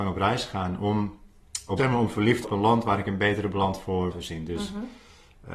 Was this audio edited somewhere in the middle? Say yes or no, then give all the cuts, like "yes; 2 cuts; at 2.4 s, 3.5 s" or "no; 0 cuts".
yes; 3 cuts; at 1.8 s, 2.4 s, 4.1 s